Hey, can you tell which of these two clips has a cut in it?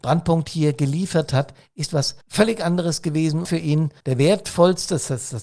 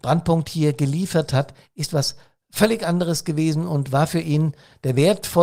first; 3 cuts; at 2.2 s, 3.4 s, 4.0 s

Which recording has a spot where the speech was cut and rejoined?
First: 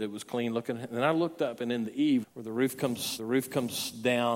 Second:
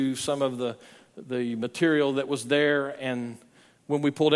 first; 2 cuts; at 2.2 s, 3.2 s

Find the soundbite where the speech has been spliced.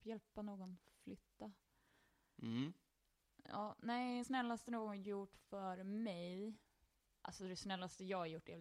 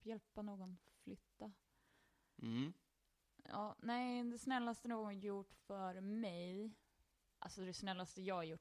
first; 1 cut; at 4.2 s

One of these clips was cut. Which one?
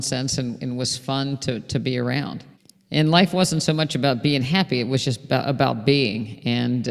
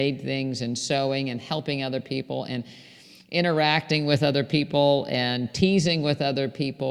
first; 1 cut; at 2.5 s

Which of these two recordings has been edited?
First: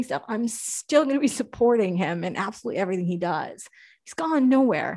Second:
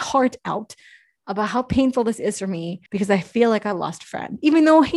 second; 1 cut; at 2.9 s

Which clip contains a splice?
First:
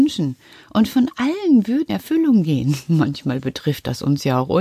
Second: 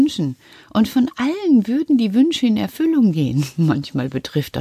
first; 1 cut; at 1.9 s

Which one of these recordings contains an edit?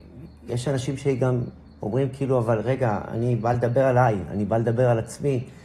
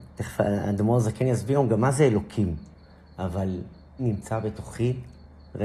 second; 1 cut; at 4.0 s

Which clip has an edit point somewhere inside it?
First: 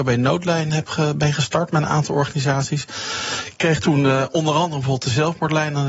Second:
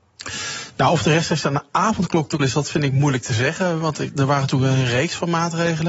second; 1 cut; at 2.4 s

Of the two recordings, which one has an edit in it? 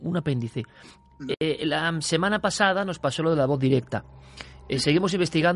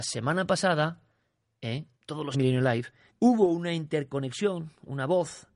second; 3 cuts; at 1.9 s, 2.3 s, 3.1 s

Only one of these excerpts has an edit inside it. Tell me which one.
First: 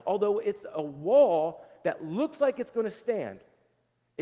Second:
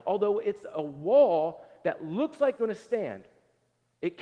second; 1 cut; at 2.6 s

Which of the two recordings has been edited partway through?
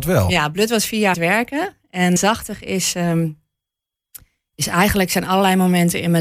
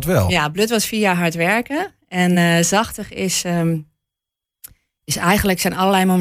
first; 2 cuts; at 1.1 s, 2.2 s

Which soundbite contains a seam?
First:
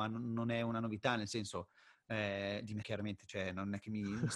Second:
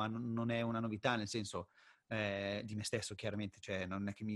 first; 1 cut; at 2.8 s

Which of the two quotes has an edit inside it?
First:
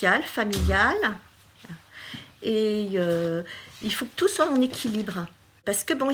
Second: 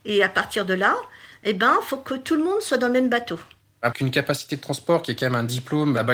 second; 1 cut; at 3.9 s

